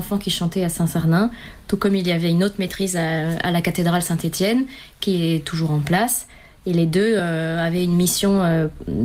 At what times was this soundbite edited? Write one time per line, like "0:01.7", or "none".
none